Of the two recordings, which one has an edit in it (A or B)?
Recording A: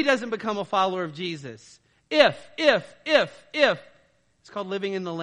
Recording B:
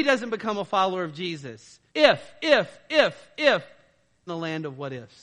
B